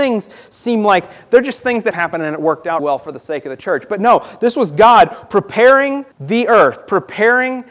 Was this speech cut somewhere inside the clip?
yes; 3 cuts; at 1.9 s, 2.8 s, 6.1 s

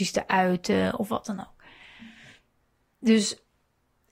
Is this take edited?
no; 0 cuts

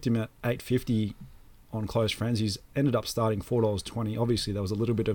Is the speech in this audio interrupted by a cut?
no; 0 cuts

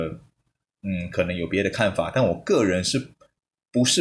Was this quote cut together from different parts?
no; 0 cuts

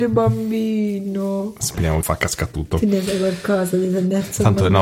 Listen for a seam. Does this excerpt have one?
yes; 1 cut; at 2.0 s

